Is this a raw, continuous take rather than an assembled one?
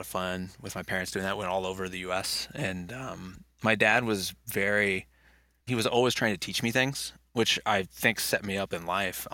yes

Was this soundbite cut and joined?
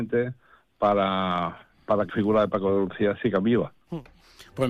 yes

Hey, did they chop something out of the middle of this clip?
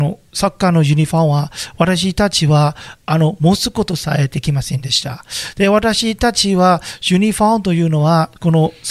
no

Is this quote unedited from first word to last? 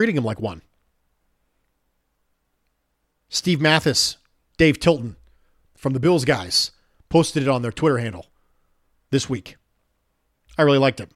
yes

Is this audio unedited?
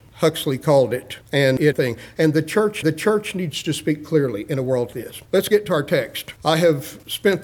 no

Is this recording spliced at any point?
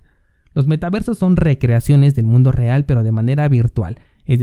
no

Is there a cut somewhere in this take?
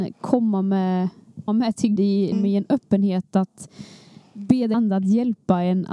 yes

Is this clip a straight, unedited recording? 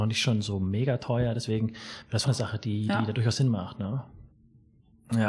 no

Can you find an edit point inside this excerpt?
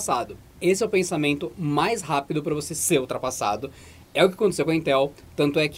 no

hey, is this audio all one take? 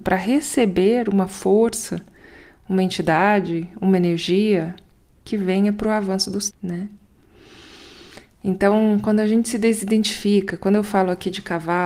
no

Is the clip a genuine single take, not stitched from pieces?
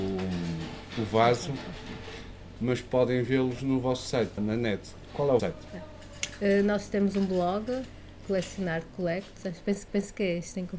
no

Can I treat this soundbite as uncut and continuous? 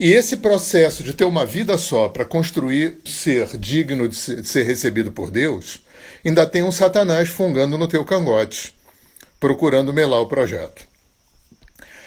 no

